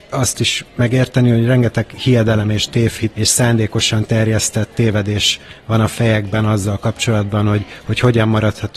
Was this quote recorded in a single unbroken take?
no; 1 cut; at 3.1 s

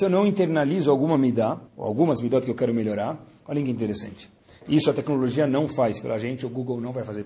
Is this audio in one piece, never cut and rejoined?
no; 1 cut; at 1.7 s

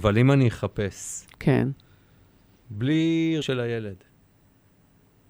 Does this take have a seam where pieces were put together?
yes; 1 cut; at 3.4 s

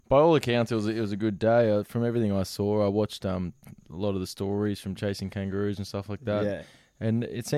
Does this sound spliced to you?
no; 0 cuts

